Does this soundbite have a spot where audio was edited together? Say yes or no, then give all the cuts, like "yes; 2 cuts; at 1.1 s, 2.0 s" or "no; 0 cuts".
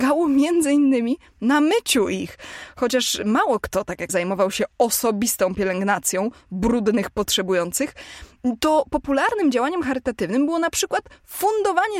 yes; 1 cut; at 4.1 s